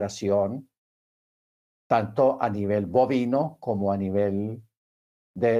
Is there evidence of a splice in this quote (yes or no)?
no